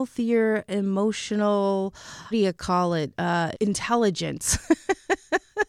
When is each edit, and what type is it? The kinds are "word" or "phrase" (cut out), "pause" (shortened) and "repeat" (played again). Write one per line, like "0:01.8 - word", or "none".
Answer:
0:02.3 - word
0:03.5 - word